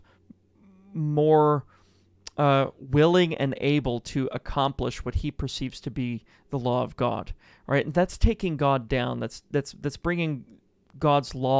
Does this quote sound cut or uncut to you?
uncut